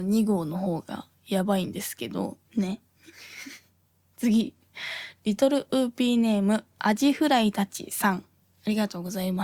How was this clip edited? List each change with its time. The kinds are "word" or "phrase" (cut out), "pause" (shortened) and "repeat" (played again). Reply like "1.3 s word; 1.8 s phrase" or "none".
2.4 s pause